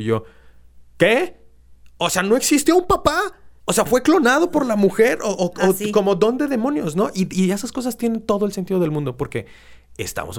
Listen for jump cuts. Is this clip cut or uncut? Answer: cut